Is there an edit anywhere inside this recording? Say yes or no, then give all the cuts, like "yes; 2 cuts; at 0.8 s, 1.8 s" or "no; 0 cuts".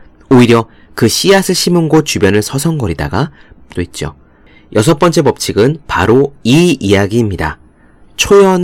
yes; 1 cut; at 3.7 s